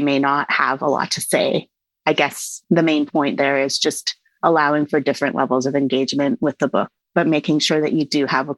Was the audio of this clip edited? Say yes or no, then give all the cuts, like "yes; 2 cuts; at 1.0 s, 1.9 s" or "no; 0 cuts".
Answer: no; 0 cuts